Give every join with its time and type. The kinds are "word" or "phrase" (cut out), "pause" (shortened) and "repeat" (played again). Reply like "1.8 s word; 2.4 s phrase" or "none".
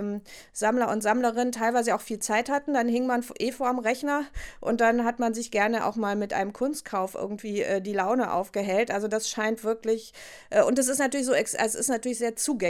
none